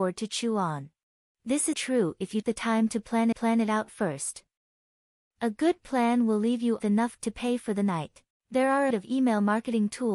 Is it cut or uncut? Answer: cut